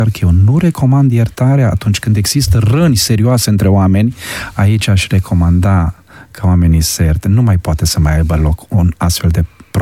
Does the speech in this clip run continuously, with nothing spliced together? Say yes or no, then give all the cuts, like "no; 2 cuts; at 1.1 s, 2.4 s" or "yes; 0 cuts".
yes; 0 cuts